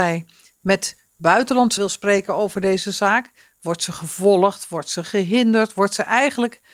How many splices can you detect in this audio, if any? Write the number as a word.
one